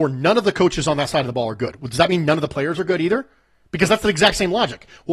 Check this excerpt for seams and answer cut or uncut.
uncut